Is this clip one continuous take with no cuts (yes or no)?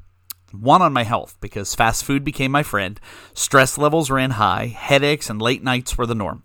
yes